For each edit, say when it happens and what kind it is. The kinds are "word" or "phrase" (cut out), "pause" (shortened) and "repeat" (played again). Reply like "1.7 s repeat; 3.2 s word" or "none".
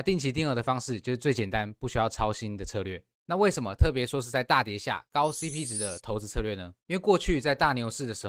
none